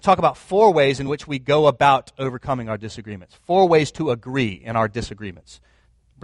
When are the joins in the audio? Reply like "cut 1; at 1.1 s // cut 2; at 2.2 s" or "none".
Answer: none